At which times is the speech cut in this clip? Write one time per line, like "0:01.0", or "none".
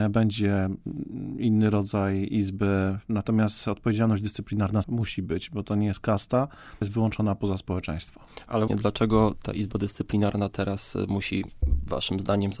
0:04.8
0:06.8
0:08.7